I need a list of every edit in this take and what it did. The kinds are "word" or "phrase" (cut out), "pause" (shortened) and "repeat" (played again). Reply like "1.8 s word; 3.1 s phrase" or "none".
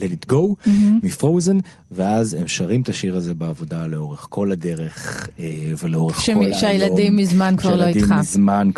none